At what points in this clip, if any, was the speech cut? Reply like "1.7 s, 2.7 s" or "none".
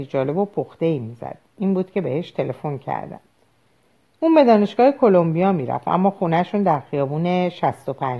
none